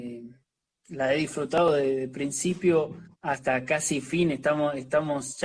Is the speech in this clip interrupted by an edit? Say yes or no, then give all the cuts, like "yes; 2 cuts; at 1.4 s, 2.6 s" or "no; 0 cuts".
yes; 1 cut; at 3.1 s